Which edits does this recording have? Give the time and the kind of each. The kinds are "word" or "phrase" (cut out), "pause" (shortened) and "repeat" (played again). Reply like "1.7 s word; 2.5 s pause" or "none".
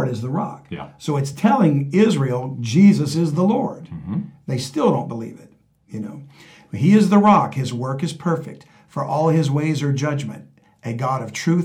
none

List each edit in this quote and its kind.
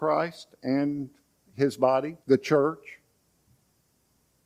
2.2 s pause

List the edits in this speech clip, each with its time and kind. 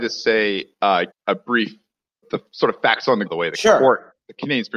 1.1 s word; 2.2 s word; 3.3 s word

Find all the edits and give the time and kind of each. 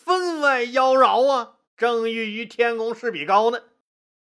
1.6 s pause

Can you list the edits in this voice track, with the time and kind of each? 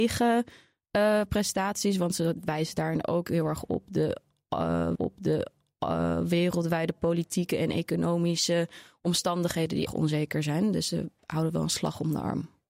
5.0 s repeat; 9.9 s word

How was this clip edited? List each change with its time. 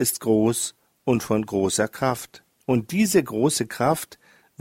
2.5 s pause

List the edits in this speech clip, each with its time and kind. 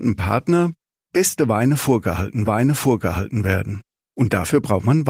2.4 s repeat

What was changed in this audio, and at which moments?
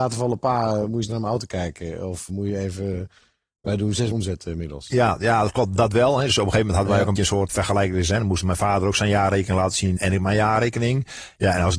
1.1 s word; 2.3 s word; 4.1 s word; 7.1 s word; 7.5 s word; 10.0 s word

